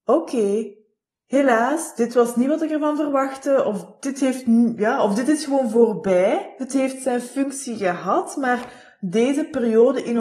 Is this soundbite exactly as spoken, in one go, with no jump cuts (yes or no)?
yes